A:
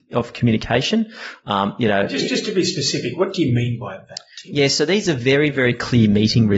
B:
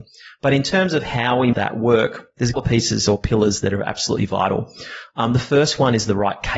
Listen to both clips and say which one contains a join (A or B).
B